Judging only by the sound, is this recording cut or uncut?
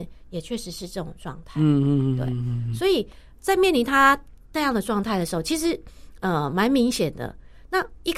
uncut